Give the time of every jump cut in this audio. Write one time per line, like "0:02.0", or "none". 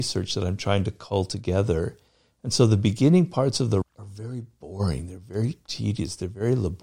0:03.8